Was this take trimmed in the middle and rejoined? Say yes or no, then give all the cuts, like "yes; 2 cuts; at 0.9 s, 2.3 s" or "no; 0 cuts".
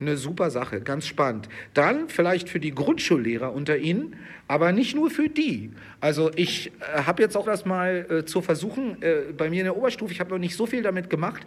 yes; 1 cut; at 7.5 s